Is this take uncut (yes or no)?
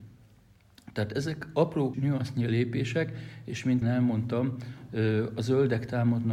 no